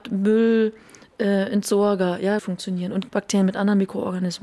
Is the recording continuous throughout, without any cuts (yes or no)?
no